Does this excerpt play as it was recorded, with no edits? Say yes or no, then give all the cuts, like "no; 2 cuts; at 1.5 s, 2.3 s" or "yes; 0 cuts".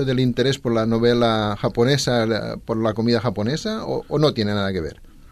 yes; 0 cuts